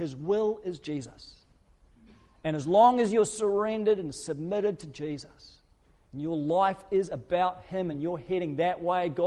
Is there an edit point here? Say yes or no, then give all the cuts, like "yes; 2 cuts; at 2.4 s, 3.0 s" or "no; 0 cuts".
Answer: no; 0 cuts